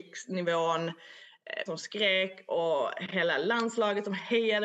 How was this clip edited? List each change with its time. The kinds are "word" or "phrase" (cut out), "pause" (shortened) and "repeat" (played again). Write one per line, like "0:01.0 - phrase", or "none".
0:01.7 - word